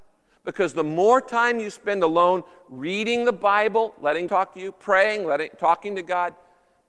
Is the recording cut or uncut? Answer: cut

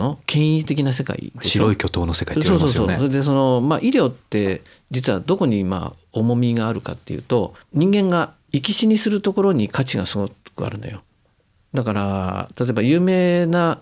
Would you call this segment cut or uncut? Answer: uncut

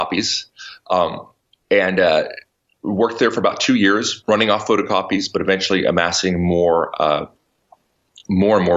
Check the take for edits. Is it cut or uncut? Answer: uncut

